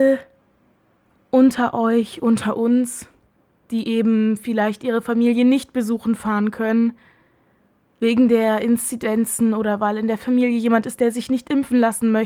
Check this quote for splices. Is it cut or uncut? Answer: uncut